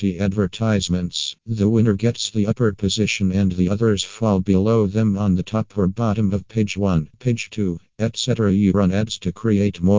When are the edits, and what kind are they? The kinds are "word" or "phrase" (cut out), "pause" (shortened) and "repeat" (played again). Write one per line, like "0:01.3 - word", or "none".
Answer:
0:01.4 - pause
0:08.7 - word

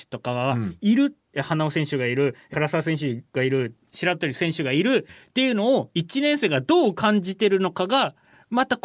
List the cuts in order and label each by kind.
0:01.2 - pause
0:02.5 - phrase
0:05.1 - phrase

